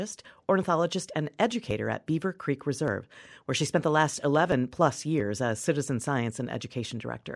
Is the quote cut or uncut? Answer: uncut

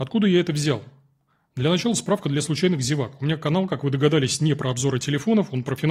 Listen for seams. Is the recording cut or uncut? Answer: uncut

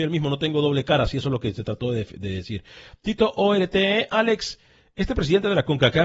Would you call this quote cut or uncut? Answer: uncut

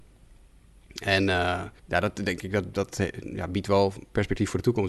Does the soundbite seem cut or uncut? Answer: cut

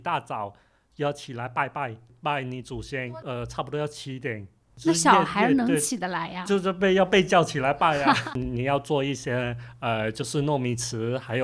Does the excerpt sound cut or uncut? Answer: uncut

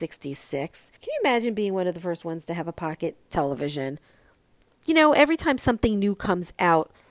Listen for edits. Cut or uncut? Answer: cut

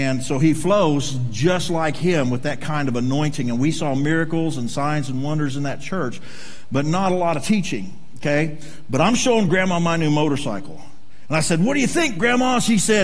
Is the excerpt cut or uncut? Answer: uncut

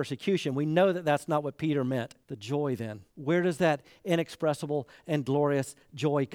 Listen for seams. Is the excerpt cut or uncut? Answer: cut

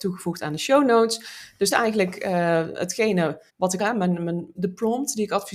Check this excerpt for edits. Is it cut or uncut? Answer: cut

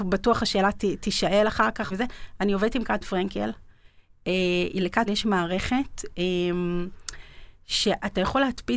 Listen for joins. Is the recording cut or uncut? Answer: cut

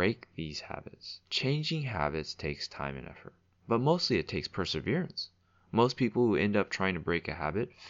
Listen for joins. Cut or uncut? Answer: uncut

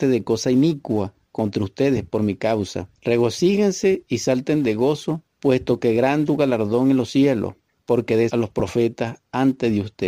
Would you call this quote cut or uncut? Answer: cut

